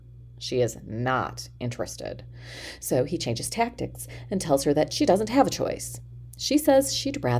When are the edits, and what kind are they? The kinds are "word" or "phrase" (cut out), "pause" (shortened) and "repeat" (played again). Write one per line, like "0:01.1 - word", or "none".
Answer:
none